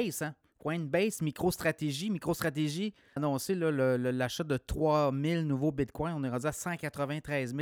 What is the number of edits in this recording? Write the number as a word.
one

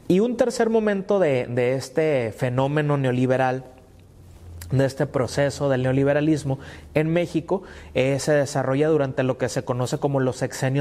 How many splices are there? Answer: zero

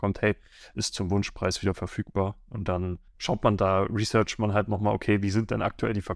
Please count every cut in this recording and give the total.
one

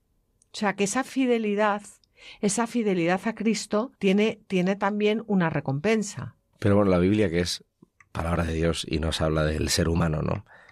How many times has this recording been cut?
three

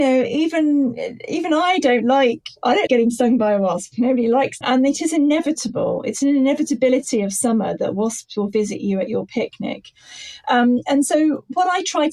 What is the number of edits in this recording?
two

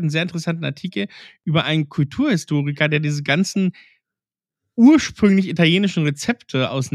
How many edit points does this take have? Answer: zero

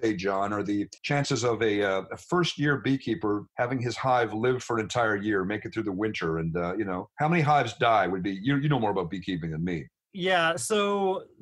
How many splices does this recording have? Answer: three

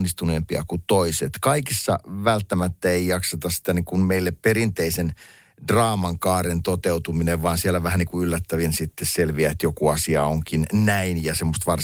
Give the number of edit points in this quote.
zero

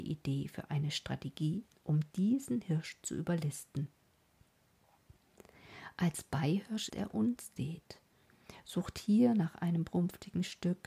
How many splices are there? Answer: two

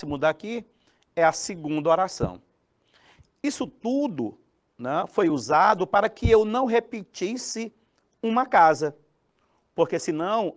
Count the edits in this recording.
zero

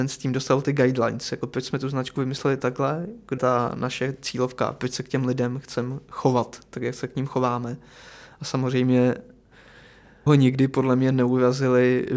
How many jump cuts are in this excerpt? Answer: two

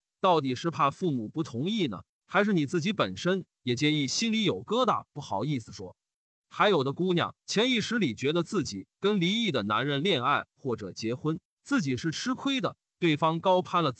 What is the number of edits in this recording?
one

